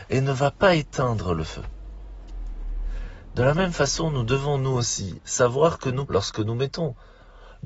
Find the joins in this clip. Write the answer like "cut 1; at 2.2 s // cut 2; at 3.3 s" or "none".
cut 1; at 6.1 s